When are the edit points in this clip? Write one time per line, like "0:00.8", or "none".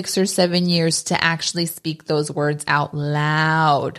none